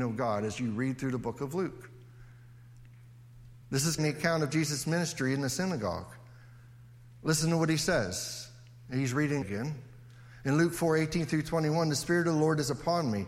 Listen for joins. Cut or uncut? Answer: cut